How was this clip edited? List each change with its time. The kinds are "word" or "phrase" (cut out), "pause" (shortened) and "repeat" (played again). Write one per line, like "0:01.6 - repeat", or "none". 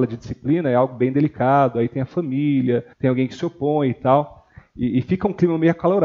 0:02.9 - pause